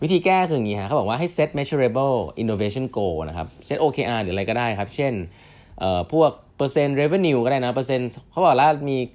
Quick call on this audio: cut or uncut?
uncut